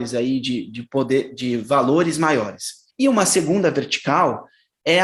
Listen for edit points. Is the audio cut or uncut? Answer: cut